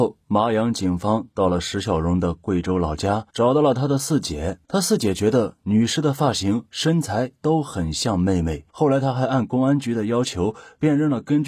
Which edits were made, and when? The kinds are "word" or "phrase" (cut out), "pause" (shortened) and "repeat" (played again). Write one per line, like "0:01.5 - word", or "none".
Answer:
0:03.3 - pause
0:04.6 - pause
0:08.7 - pause